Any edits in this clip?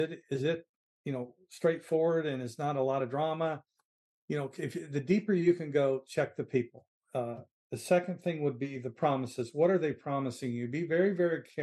no; 0 cuts

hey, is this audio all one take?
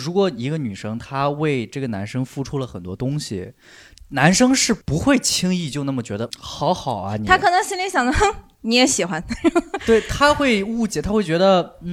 no; 2 cuts; at 4.8 s, 6.3 s

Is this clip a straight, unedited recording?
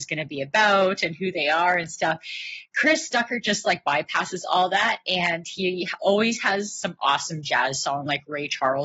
yes; 0 cuts

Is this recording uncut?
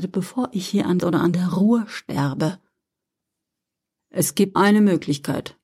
no; 2 cuts; at 1.0 s, 4.5 s

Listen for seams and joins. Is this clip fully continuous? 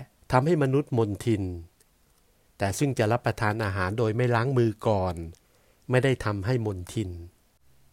yes; 0 cuts

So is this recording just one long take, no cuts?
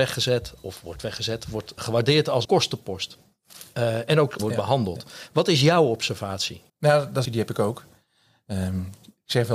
no; 5 cuts; at 1.8 s, 2.4 s, 4.4 s, 6.7 s, 7.2 s

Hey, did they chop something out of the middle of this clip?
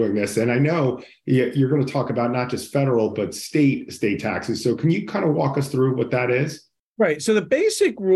no; 0 cuts

